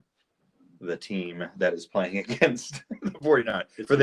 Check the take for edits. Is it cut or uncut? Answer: uncut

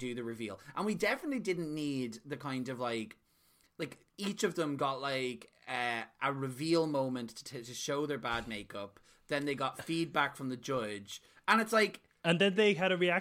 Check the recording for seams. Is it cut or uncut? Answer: uncut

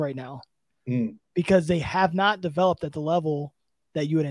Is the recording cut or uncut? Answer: uncut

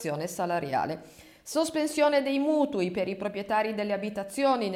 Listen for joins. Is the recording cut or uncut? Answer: uncut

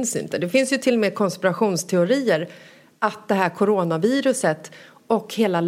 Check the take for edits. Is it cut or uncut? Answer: uncut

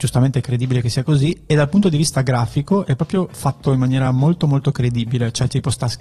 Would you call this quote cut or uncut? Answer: uncut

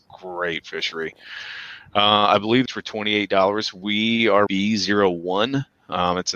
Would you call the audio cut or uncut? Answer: cut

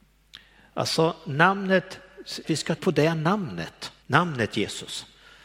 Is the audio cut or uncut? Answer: cut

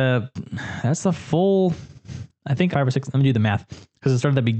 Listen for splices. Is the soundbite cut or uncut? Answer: cut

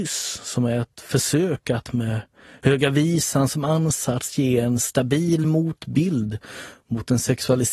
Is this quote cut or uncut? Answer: uncut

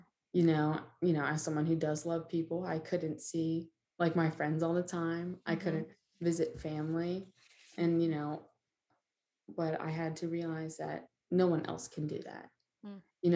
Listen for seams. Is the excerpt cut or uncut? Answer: uncut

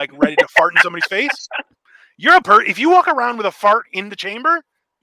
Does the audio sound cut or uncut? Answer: cut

